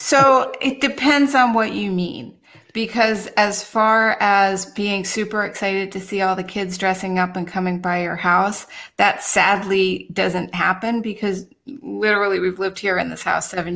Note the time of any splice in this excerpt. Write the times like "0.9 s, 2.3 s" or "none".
none